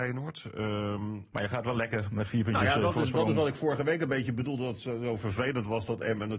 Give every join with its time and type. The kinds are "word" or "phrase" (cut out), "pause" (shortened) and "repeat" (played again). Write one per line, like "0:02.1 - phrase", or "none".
none

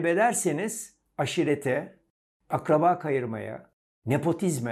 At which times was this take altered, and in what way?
none

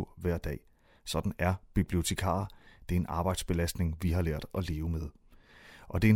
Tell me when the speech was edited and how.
none

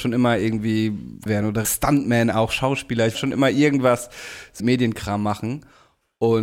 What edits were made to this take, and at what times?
0:01.3 - word
0:01.6 - word
0:03.1 - phrase
0:04.6 - word

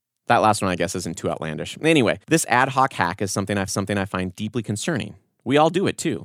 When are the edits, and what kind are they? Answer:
0:02.2 - pause
0:03.7 - repeat

